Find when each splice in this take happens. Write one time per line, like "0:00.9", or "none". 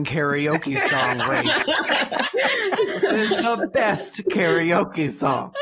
none

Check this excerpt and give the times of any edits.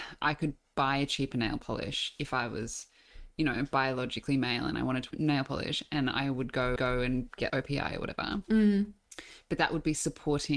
0:05.1
0:06.8
0:07.5

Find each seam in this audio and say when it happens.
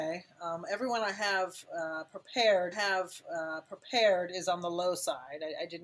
0:02.7

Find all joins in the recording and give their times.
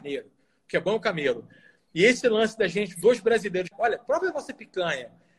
0:03.7

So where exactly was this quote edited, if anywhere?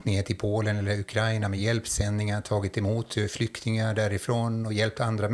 none

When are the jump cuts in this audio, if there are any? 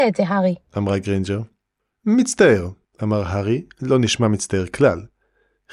none

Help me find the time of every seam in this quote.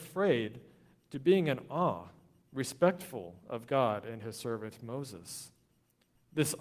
none

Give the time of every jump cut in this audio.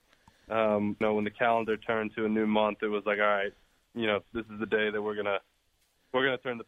0:01.0

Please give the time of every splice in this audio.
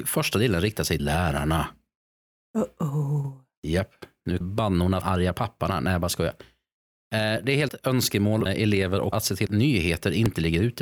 0:01.0
0:04.4
0:05.0
0:07.7
0:08.5
0:09.1
0:09.5

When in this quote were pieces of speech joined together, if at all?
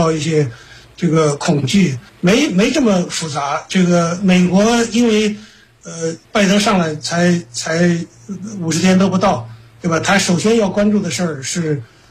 0:02.1
0:06.2

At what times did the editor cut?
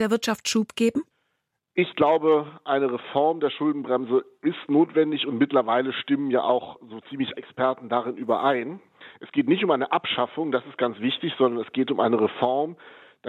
0:07.4

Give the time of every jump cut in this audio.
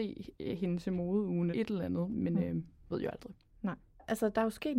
0:01.5
0:02.9

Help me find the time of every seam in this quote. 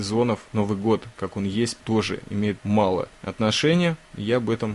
none

